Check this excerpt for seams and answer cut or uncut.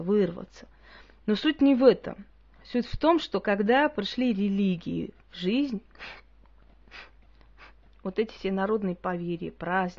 uncut